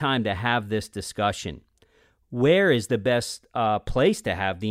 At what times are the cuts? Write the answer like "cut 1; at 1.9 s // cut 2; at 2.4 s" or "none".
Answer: none

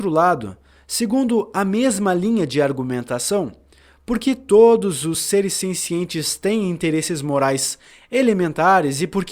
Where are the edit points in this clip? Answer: none

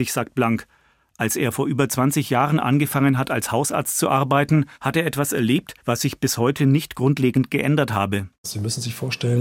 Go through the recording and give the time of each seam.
cut 1; at 4.7 s // cut 2; at 5.8 s // cut 3; at 8.3 s

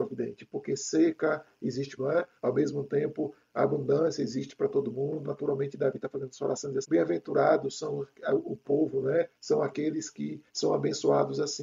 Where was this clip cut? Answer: cut 1; at 2.0 s // cut 2; at 2.4 s // cut 3; at 5.2 s // cut 4; at 6.8 s // cut 5; at 9.4 s // cut 6; at 10.5 s

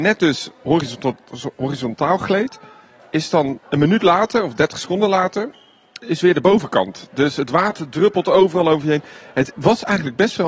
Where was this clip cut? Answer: cut 1; at 3.6 s // cut 2; at 6.0 s

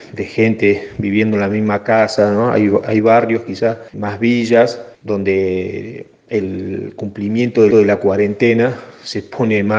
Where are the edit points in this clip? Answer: cut 1; at 3.9 s // cut 2; at 4.9 s // cut 3; at 7.7 s

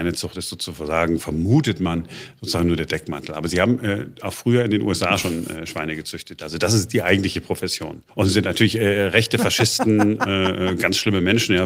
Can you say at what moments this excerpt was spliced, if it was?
cut 1; at 8.1 s

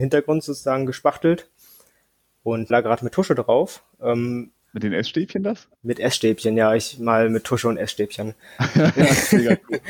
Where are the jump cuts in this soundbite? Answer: cut 1; at 2.7 s // cut 2; at 4.6 s // cut 3; at 5.8 s

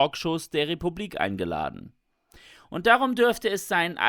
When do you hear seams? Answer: none

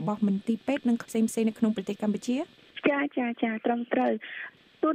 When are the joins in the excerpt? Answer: cut 1; at 1.0 s

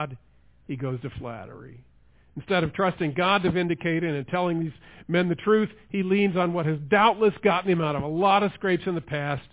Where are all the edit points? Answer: none

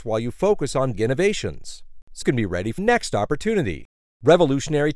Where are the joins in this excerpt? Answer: cut 1; at 0.9 s // cut 2; at 2.2 s // cut 3; at 2.8 s

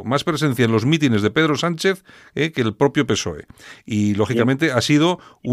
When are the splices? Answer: none

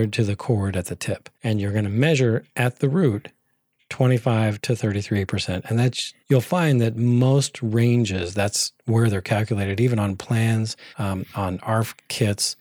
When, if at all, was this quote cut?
cut 1; at 1.3 s // cut 2; at 6.2 s // cut 3; at 10.9 s

